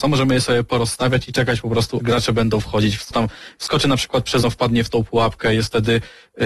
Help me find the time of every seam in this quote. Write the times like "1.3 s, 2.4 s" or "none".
2.0 s, 3.1 s, 4.4 s